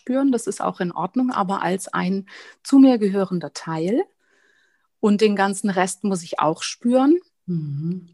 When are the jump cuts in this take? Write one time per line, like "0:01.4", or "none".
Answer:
none